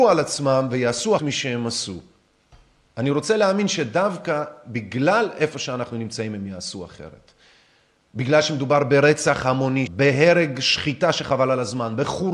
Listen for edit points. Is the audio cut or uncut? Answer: cut